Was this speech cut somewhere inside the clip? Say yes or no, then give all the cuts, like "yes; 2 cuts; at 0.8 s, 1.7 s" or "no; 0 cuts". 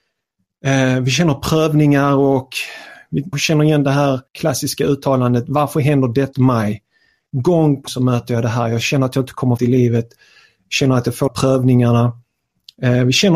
yes; 6 cuts; at 3.3 s, 4.3 s, 6.3 s, 7.9 s, 9.6 s, 11.3 s